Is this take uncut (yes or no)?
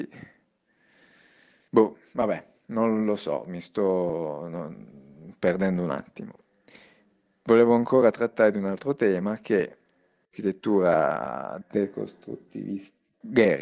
yes